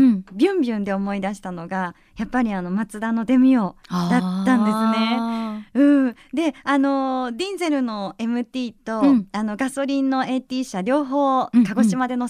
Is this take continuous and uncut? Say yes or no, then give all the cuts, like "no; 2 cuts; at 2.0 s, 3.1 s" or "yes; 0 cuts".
no; 1 cut; at 3.8 s